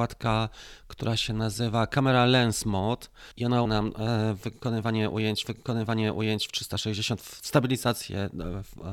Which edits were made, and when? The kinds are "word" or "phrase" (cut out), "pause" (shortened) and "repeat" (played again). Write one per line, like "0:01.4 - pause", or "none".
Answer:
0:03.3 - pause
0:03.7 - word
0:05.4 - repeat